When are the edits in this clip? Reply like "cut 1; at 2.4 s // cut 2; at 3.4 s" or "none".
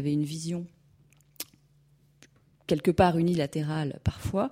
none